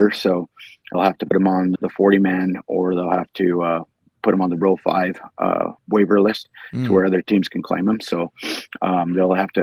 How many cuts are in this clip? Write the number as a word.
three